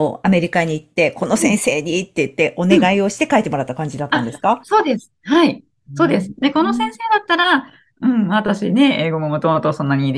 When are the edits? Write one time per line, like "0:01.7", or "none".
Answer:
none

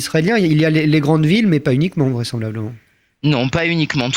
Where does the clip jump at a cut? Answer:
none

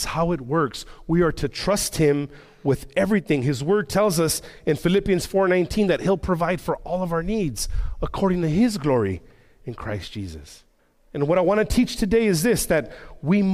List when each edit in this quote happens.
0:10.8

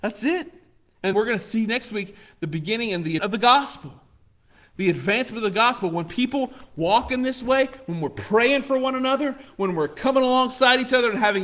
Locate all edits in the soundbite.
0:01.1
0:03.2

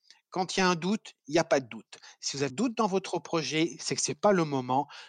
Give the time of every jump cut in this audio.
0:02.5

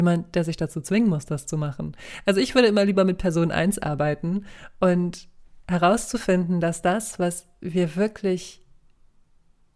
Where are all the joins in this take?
none

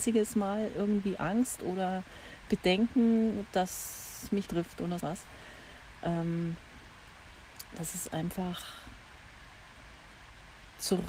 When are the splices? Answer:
0:04.5
0:05.0

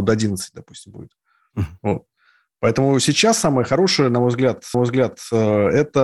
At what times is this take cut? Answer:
0:01.8
0:04.7

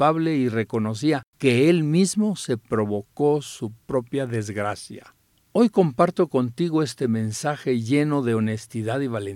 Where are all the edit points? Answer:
0:01.3
0:05.4

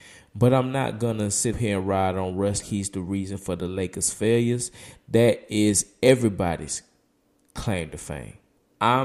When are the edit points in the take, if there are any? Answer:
0:01.5
0:02.6

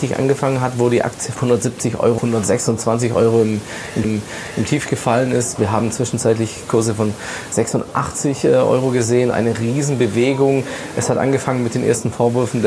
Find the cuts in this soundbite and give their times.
0:01.3
0:02.2
0:04.0
0:09.3

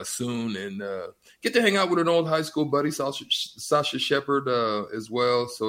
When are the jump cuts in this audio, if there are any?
none

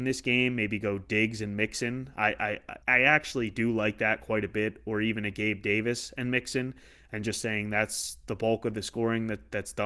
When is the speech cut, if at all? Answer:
0:02.8

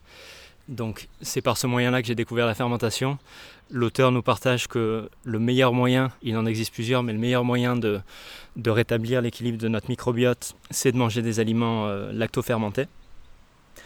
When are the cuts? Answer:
0:06.2
0:10.6

